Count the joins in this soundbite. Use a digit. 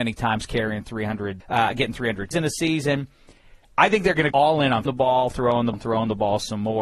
5